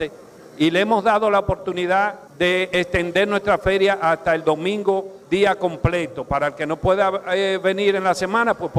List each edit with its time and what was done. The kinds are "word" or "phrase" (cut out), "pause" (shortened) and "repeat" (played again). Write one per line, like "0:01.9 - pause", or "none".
0:02.3 - pause
0:05.2 - pause